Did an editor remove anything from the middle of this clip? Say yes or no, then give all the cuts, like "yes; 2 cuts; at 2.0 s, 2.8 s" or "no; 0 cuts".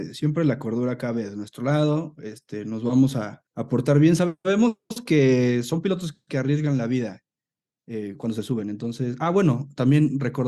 yes; 1 cut; at 3.5 s